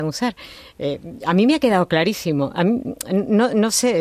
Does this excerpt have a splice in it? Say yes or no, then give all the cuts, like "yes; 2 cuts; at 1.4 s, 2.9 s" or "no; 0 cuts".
no; 0 cuts